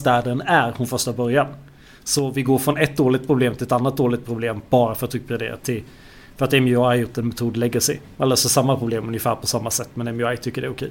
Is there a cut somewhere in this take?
no; 0 cuts

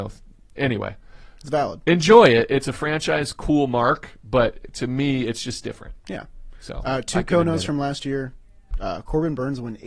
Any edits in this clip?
no; 0 cuts

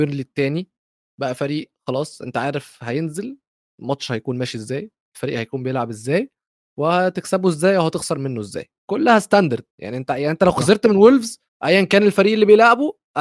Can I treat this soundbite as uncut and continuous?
no; 3 cuts; at 8.8 s, 9.7 s, 11.5 s

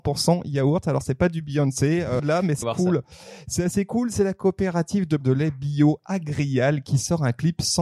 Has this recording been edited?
yes; 3 cuts; at 2.2 s, 2.6 s, 5.2 s

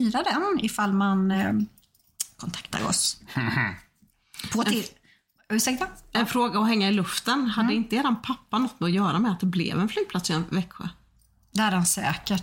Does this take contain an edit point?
no; 0 cuts

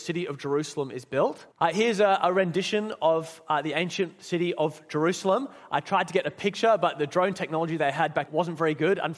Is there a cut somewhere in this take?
yes; 2 cuts; at 1.5 s, 8.3 s

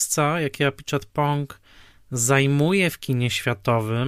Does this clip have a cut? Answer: no; 0 cuts

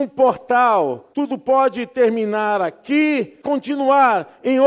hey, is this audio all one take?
no; 2 cuts; at 1.1 s, 3.4 s

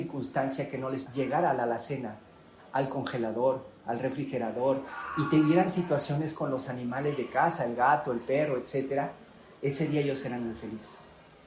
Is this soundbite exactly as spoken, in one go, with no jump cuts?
no; 1 cut; at 1.1 s

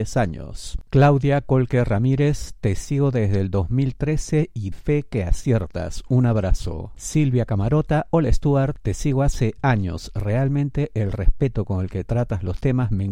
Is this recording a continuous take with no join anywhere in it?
no; 1 cut; at 4.7 s

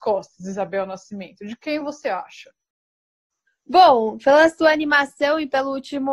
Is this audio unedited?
yes; 0 cuts

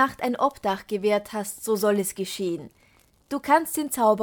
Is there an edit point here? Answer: no; 0 cuts

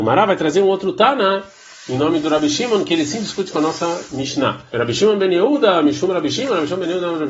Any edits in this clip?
yes; 1 cut; at 4.7 s

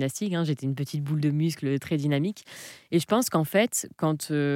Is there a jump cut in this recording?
yes; 1 cut; at 1.8 s

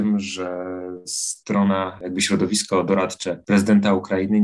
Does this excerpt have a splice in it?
no; 0 cuts

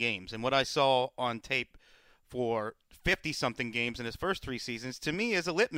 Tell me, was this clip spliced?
no; 0 cuts

